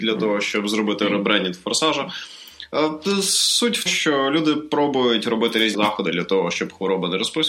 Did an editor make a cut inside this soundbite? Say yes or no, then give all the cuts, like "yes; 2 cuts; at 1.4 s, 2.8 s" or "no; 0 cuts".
yes; 2 cuts; at 3.9 s, 5.7 s